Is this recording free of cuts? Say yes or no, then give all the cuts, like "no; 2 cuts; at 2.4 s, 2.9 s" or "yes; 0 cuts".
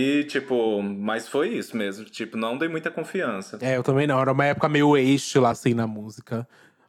yes; 0 cuts